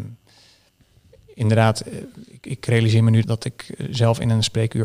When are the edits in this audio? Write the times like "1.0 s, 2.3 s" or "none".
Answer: 3.2 s